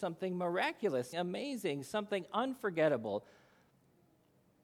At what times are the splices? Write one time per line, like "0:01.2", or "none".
0:01.1